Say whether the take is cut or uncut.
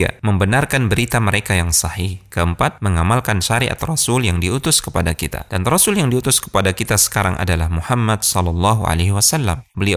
uncut